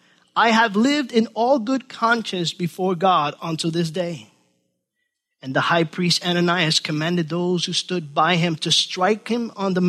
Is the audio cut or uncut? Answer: uncut